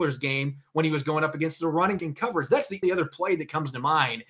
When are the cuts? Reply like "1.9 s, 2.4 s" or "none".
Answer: 2.0 s, 2.8 s